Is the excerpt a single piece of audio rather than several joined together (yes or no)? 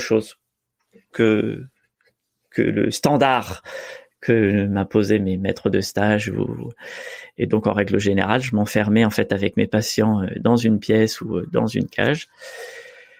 no